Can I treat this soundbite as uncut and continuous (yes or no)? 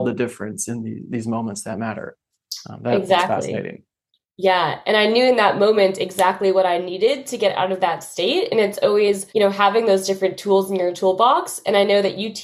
no